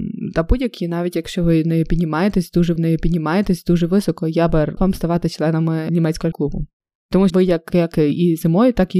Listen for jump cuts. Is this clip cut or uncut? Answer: cut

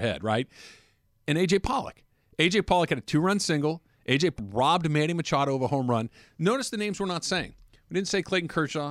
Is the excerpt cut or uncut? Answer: cut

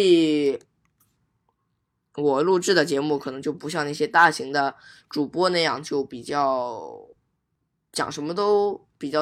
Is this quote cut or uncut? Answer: uncut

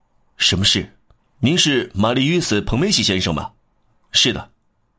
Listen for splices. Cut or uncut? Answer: cut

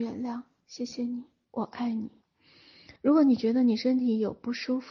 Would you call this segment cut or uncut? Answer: cut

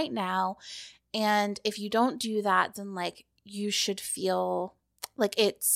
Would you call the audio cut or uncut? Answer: uncut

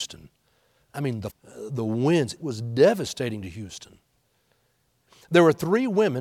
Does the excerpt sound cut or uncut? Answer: cut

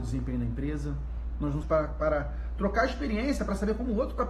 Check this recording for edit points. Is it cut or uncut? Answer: cut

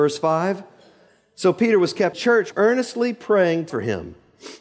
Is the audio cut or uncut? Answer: cut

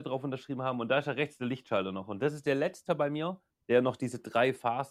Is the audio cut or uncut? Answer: cut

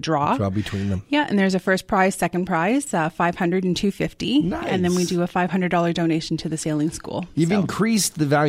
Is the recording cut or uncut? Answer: uncut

